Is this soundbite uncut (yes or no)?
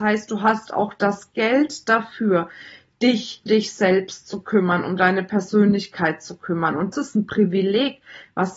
no